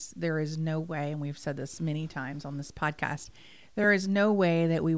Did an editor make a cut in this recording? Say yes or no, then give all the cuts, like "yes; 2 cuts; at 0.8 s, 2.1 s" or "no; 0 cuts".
no; 0 cuts